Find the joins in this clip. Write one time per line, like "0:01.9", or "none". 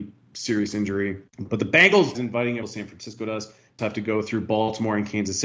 0:01.3
0:02.1
0:02.6
0:03.8

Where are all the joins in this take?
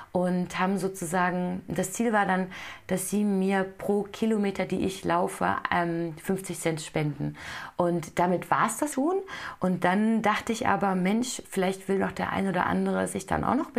0:08.9

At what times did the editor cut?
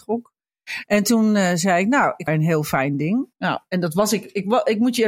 0:02.3
0:03.3

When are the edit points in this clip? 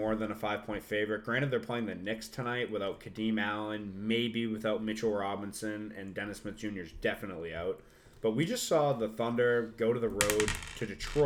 none

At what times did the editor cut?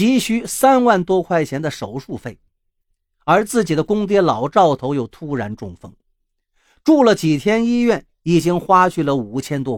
none

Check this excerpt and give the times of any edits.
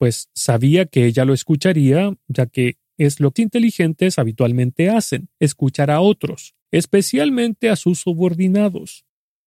0:03.4
0:05.3
0:06.6

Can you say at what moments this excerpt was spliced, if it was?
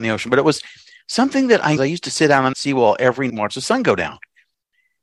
0:01.8
0:02.5
0:03.3

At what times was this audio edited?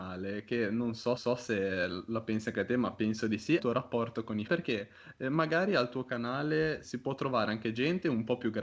0:01.2
0:03.6
0:04.5
0:06.8

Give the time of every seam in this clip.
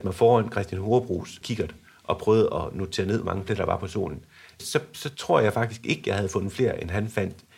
none

